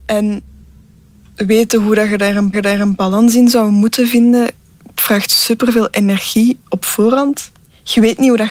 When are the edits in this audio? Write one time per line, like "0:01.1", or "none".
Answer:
0:02.5